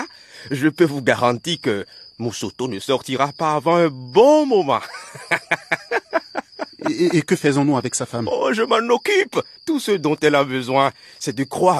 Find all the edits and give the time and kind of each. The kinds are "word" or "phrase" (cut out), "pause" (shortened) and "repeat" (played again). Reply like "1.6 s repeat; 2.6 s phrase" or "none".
9.6 s pause